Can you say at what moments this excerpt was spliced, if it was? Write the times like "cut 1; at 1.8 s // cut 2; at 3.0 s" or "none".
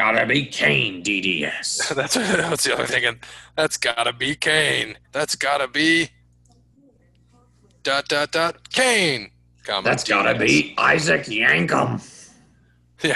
cut 1; at 2.9 s // cut 2; at 5.0 s